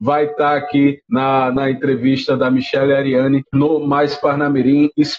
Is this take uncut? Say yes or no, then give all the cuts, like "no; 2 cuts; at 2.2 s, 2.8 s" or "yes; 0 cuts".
yes; 0 cuts